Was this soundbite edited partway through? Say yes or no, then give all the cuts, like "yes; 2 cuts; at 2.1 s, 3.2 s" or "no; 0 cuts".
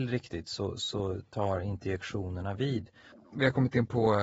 no; 0 cuts